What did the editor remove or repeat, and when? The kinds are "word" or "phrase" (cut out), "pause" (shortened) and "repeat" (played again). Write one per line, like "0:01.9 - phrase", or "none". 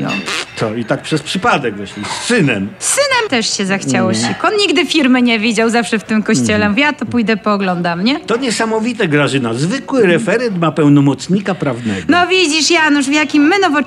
0:03.3 - phrase